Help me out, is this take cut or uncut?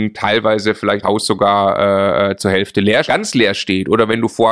cut